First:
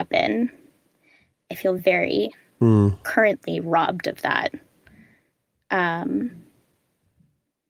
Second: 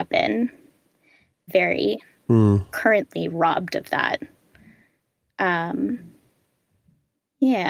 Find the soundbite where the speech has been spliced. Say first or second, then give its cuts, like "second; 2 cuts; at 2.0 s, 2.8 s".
second; 1 cut; at 1.5 s